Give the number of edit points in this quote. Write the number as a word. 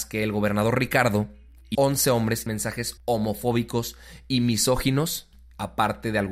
three